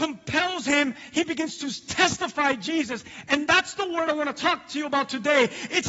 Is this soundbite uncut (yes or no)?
yes